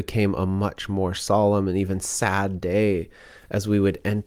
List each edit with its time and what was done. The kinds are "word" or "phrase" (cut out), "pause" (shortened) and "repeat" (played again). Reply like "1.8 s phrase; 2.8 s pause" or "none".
none